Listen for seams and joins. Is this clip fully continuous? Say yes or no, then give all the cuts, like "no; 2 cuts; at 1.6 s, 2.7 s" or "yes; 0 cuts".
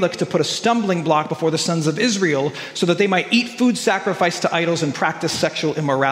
yes; 0 cuts